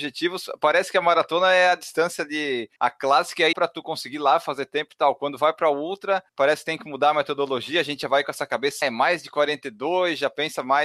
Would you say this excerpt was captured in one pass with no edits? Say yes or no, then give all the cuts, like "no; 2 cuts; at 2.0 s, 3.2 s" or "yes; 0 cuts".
no; 4 cuts; at 2.8 s, 3.5 s, 6.3 s, 8.8 s